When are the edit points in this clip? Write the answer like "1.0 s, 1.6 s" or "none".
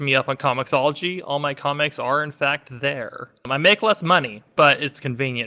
none